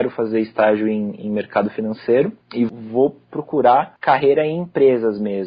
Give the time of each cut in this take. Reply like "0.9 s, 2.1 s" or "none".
2.4 s

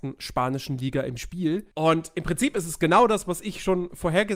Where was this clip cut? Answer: 1.7 s

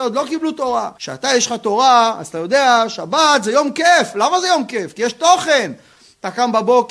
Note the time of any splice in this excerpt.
0.9 s

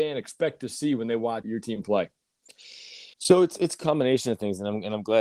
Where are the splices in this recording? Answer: 1.4 s, 3.1 s

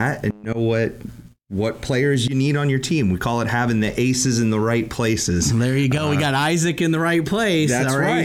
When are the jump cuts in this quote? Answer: none

